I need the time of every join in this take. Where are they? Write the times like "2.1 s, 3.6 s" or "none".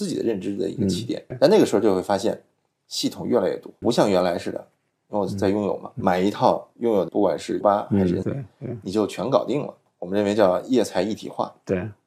1.3 s, 3.8 s, 6.0 s, 7.1 s, 7.6 s, 8.2 s

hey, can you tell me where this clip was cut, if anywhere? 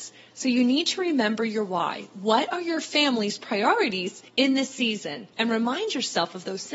4.3 s, 5.3 s

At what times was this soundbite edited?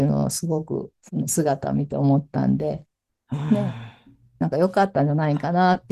1.0 s

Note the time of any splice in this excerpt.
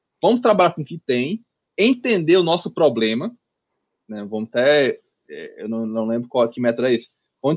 none

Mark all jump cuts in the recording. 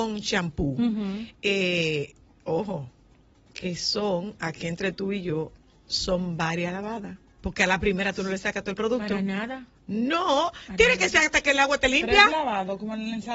none

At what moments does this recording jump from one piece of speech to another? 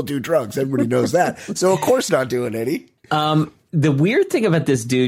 2.1 s, 3.0 s

